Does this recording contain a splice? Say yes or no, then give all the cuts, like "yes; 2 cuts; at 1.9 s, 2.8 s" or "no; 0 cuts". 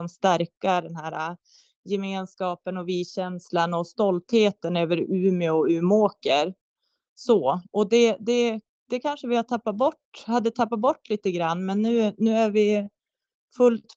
no; 0 cuts